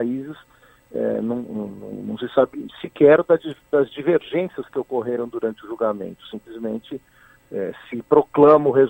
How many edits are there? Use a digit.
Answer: 0